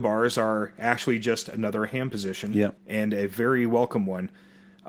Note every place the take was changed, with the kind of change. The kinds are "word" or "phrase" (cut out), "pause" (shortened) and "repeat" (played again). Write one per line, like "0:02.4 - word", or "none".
0:02.8 - pause